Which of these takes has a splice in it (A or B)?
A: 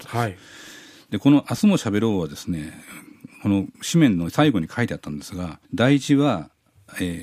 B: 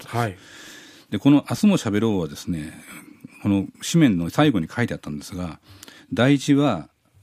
A